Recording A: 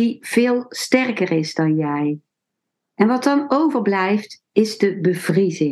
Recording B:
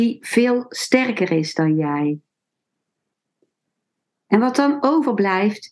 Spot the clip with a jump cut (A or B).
A